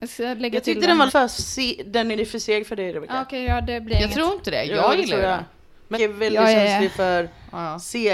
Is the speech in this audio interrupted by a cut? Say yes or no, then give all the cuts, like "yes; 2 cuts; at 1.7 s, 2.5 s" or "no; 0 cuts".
yes; 2 cuts; at 1.1 s, 5.9 s